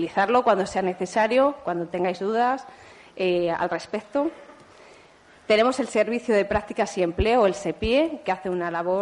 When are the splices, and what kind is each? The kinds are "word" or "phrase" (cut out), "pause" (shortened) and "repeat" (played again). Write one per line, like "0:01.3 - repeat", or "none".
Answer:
none